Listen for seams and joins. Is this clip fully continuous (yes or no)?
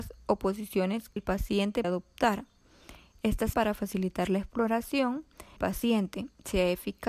no